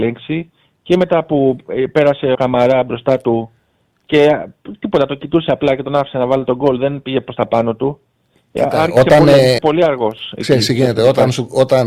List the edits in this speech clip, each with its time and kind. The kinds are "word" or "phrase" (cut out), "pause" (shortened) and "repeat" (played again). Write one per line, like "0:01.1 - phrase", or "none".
0:02.3 - word
0:09.6 - word